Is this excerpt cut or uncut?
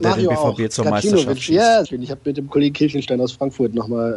cut